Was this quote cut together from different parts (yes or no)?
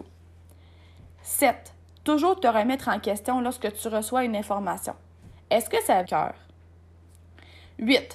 yes